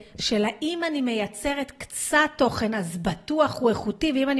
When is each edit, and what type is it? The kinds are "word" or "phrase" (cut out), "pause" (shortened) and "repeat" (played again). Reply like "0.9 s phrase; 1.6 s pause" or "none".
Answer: none